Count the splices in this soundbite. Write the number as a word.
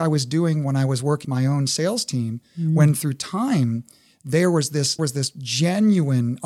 two